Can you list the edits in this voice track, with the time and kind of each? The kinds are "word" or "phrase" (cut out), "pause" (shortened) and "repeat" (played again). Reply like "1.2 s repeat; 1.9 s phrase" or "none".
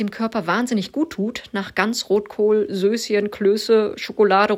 none